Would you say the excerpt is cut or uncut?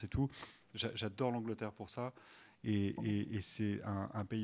uncut